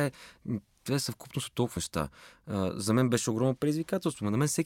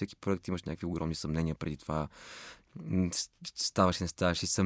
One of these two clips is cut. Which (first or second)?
first